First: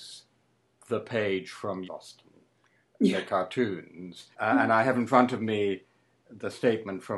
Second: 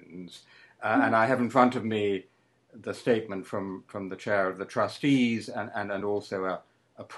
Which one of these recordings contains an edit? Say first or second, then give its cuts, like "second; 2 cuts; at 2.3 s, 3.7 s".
first; 2 cuts; at 1.8 s, 4.3 s